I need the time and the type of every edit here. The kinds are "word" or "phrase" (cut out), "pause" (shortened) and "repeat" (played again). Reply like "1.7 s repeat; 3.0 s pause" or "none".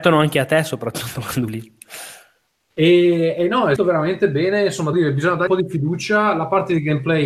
1.5 s word; 3.8 s word; 4.9 s word; 5.5 s word